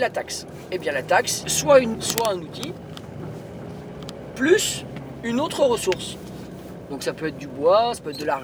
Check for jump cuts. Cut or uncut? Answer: cut